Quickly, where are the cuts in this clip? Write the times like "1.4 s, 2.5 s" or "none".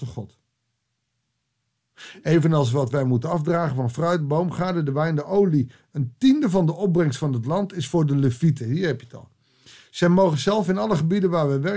none